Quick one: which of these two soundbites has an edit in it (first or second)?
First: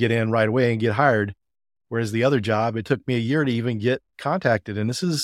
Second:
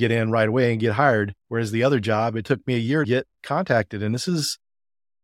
second